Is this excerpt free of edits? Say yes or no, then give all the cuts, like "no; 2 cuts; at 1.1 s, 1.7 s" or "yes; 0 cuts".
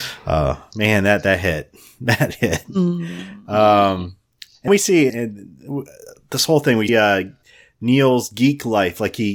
no; 3 cuts; at 4.7 s, 5.1 s, 6.9 s